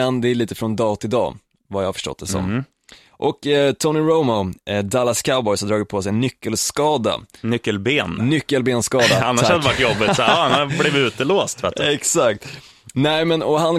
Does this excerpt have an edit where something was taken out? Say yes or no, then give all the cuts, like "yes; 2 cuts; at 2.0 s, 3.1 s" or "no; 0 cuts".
no; 0 cuts